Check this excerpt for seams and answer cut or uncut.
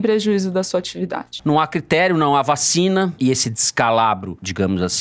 uncut